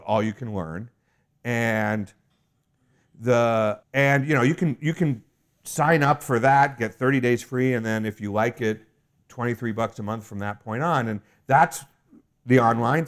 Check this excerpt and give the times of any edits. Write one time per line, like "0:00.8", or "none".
0:03.8